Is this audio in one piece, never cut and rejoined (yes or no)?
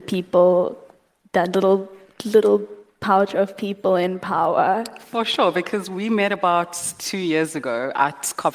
yes